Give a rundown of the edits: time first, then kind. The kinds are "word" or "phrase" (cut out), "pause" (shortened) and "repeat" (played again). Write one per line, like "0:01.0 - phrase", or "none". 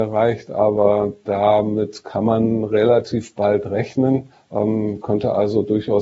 0:04.3 - pause